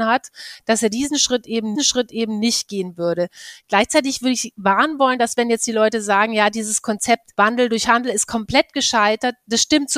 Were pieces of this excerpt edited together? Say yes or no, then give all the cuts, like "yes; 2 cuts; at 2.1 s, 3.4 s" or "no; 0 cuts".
yes; 2 cuts; at 1.7 s, 7.3 s